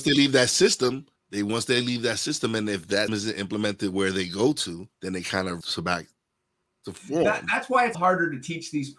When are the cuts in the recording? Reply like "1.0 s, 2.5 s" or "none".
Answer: 1.2 s, 3.1 s, 4.9 s, 5.6 s, 7.9 s

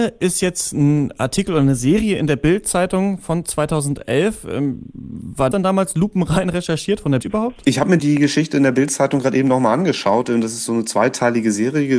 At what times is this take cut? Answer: 5.5 s, 7.2 s, 8.0 s, 10.7 s

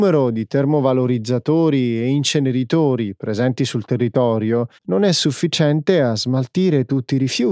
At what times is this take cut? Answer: 4.8 s

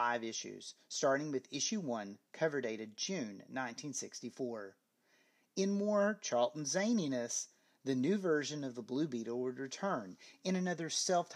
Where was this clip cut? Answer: none

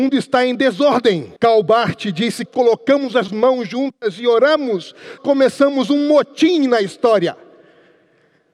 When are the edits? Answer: 1.4 s, 2.5 s, 3.3 s, 5.2 s

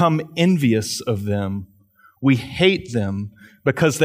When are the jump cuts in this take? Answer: none

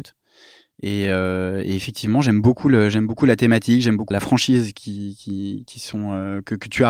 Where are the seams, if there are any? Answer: 4.1 s

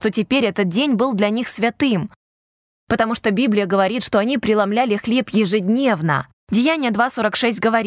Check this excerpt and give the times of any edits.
none

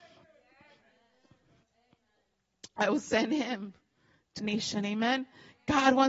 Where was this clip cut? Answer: 4.4 s

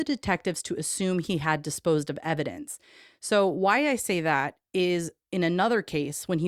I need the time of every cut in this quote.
none

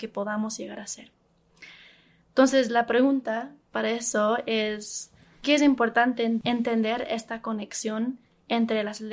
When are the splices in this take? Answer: 5.4 s

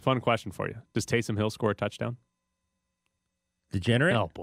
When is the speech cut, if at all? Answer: none

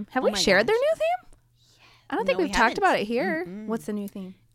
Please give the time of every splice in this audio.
none

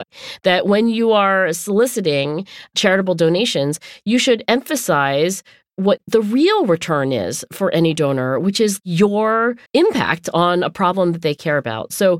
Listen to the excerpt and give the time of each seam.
9.7 s

